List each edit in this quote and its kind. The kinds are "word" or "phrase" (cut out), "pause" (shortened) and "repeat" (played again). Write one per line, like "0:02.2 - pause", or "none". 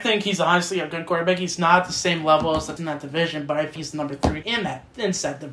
0:02.8 - phrase
0:03.8 - word
0:04.4 - word

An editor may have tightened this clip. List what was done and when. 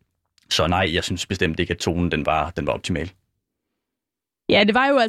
none

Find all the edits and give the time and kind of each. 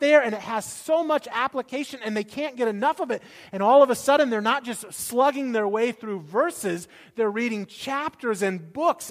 none

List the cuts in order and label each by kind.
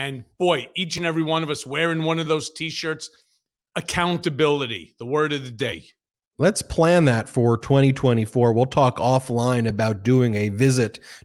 none

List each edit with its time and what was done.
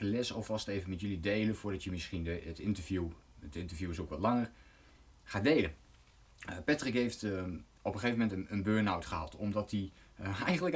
none

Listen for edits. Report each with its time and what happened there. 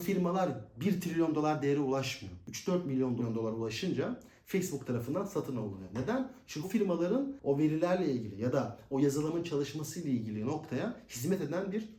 0:06.6 - word

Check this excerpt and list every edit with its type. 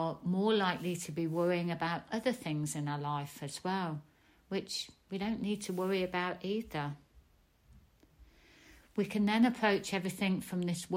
none

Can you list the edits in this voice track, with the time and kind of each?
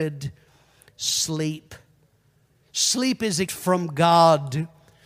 0:03.5 - word

